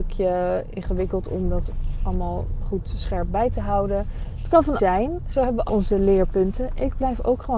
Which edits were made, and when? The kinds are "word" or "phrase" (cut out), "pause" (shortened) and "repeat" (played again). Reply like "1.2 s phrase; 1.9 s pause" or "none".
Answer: 4.8 s word; 5.7 s phrase